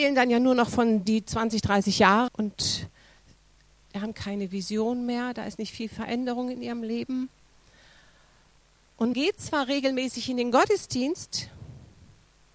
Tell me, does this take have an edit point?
yes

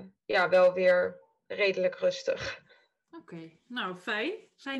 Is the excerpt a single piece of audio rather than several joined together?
yes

